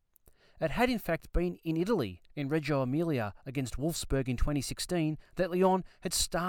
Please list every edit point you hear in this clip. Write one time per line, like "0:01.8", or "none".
0:02.3